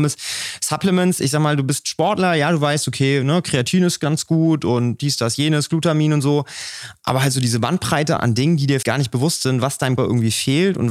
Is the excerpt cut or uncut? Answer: cut